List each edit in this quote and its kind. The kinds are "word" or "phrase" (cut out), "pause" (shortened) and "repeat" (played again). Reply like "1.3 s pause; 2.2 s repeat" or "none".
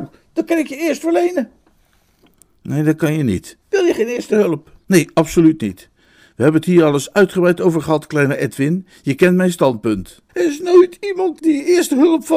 1.0 s word; 3.6 s pause; 4.8 s pause; 10.3 s pause; 11.4 s word